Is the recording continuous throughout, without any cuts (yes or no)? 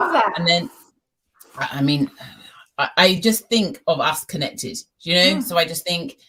yes